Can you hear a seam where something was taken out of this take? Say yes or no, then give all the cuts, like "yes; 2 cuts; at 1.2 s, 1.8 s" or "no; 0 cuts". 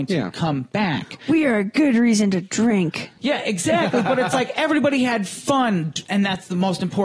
yes; 1 cut; at 3.2 s